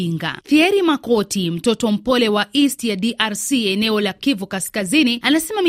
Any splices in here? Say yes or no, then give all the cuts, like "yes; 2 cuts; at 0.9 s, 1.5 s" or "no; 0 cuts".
no; 0 cuts